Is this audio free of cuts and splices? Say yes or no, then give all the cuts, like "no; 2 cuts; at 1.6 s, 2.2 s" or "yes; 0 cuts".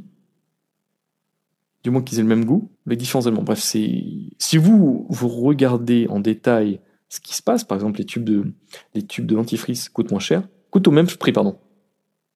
no; 2 cuts; at 2.7 s, 7.0 s